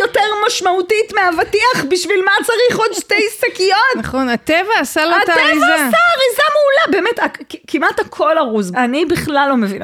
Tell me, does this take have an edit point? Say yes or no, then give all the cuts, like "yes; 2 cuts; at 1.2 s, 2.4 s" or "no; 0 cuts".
yes; 1 cut; at 8.7 s